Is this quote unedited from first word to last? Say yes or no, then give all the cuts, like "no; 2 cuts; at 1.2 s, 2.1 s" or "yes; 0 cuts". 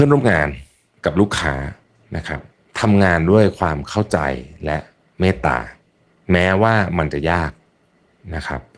yes; 0 cuts